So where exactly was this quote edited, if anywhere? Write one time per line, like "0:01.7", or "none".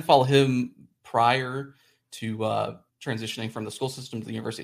0:02.9